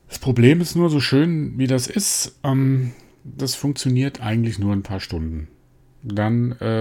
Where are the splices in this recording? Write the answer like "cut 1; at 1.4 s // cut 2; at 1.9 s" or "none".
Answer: none